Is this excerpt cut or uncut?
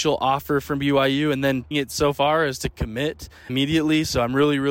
cut